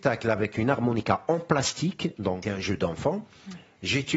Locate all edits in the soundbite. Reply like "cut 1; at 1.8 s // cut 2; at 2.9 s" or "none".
cut 1; at 2.4 s